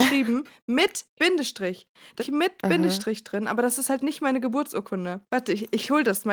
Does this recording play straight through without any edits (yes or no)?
no